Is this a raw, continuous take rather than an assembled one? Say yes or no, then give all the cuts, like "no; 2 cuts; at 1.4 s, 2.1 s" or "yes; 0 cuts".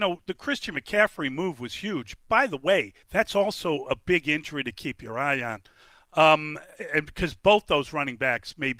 no; 1 cut; at 3.0 s